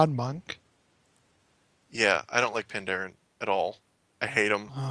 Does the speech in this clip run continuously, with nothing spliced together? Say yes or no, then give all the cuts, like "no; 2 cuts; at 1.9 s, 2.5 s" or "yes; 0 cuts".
yes; 0 cuts